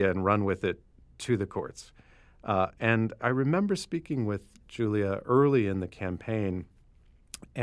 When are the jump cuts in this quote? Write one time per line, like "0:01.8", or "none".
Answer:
0:03.2